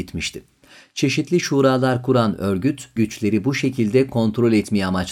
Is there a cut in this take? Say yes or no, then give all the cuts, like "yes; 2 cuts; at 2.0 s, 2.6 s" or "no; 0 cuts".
yes; 1 cut; at 3.0 s